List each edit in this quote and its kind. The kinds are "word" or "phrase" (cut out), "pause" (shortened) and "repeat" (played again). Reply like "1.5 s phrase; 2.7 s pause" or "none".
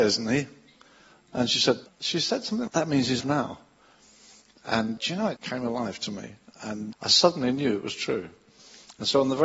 1.9 s pause; 2.7 s word; 3.2 s word; 5.0 s word; 5.4 s word; 6.9 s word